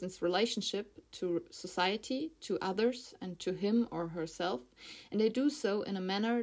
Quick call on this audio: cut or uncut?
uncut